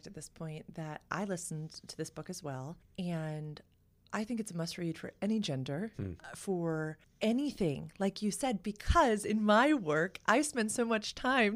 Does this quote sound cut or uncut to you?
cut